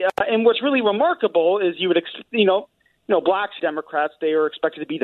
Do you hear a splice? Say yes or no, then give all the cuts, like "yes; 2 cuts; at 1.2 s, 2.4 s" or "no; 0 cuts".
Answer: yes; 1 cut; at 3.6 s